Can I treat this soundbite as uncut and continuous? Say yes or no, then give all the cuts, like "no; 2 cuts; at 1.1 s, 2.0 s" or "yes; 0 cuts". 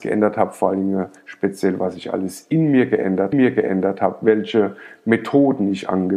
no; 1 cut; at 3.3 s